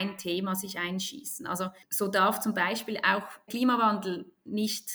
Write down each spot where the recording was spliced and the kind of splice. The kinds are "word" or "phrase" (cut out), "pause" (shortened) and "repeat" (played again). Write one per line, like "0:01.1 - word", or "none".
0:01.8 - pause
0:03.5 - word